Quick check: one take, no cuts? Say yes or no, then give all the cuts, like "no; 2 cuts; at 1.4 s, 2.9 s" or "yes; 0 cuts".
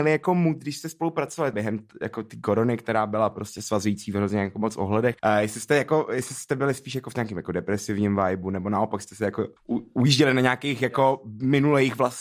no; 3 cuts; at 1.5 s, 5.2 s, 9.6 s